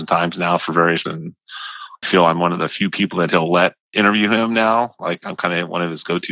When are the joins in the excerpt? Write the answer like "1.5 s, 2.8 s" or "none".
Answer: 1.0 s, 2.0 s